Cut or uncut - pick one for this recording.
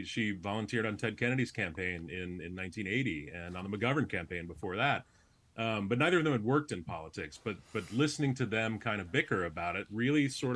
uncut